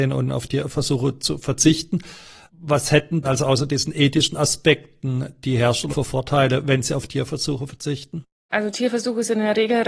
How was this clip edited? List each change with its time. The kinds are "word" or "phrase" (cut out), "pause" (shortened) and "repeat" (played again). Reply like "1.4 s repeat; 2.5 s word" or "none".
3.2 s word; 5.9 s word